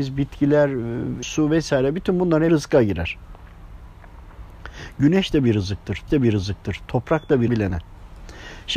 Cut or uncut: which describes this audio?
cut